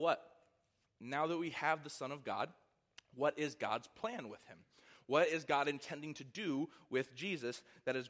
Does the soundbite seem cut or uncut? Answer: uncut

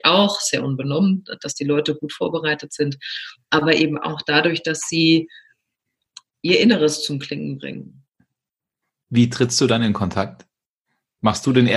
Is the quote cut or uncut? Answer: uncut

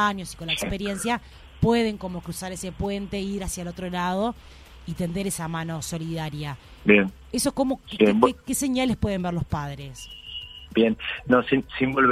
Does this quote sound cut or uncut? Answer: uncut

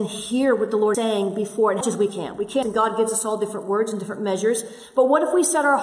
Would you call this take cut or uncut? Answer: cut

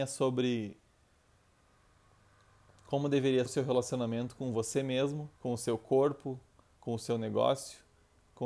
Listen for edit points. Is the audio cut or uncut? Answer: cut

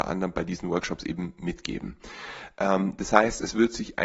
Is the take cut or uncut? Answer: uncut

